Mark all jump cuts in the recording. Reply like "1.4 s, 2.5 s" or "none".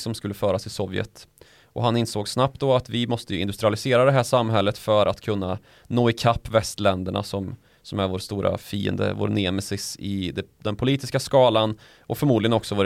none